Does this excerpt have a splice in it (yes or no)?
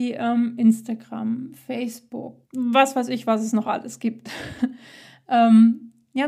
yes